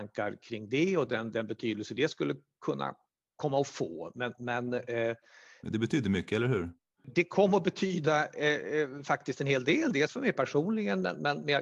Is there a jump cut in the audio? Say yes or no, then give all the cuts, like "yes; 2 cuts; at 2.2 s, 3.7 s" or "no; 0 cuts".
no; 0 cuts